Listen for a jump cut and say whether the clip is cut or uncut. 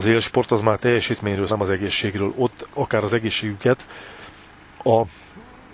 cut